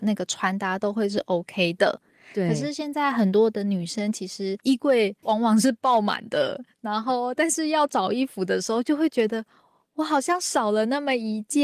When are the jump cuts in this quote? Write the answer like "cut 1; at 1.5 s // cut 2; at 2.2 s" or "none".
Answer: cut 1; at 4.6 s